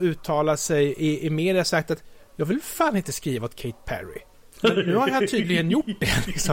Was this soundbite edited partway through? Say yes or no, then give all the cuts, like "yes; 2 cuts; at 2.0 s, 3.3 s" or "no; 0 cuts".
no; 0 cuts